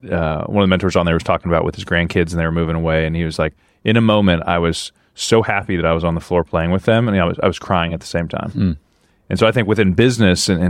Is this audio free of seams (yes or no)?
yes